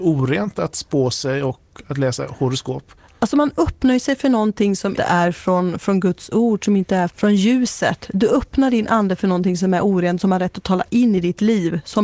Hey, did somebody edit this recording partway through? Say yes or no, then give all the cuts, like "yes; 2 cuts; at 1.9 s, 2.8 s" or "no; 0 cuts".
yes; 3 cuts; at 3.0 s, 5.0 s, 7.1 s